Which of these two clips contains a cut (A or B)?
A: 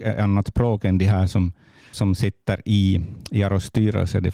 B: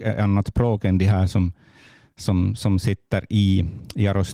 A